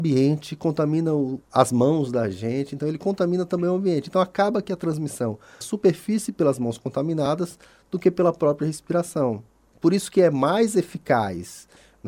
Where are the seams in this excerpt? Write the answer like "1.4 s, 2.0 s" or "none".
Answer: 1.4 s, 5.6 s